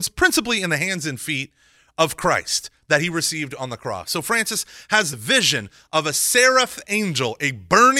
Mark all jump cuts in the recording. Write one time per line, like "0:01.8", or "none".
0:05.1